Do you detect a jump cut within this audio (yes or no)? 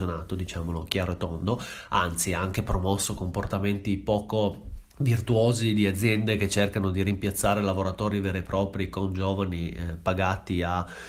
yes